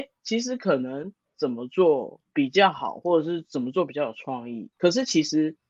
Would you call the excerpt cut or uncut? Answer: cut